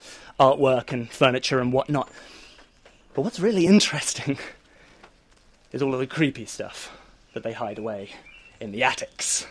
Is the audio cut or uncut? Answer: uncut